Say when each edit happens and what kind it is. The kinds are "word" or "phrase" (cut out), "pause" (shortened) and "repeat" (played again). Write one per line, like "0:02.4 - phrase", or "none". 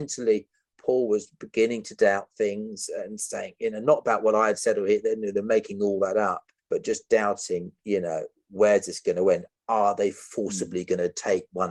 0:06.6 - pause